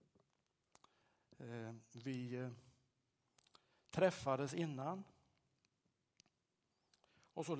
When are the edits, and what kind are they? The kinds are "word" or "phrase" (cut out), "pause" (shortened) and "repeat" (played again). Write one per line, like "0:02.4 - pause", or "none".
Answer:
none